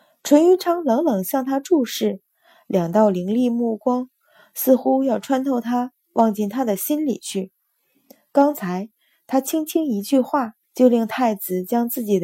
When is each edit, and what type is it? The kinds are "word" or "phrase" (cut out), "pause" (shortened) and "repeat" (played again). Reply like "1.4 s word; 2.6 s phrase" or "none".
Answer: 10.6 s pause

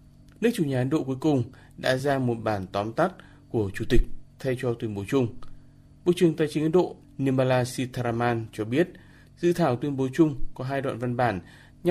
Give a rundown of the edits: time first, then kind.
none

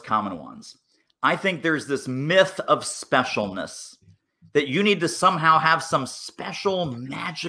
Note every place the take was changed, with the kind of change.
none

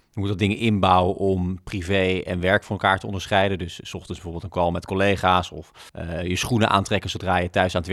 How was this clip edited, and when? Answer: 5.9 s pause

